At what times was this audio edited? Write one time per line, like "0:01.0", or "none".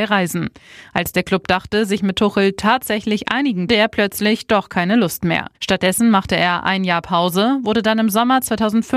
0:03.7
0:05.5